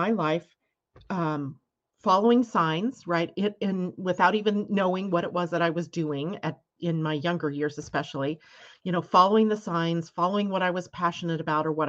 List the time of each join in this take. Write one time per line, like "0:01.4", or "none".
none